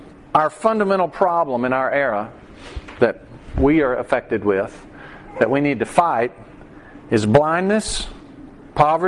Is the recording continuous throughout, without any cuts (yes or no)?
yes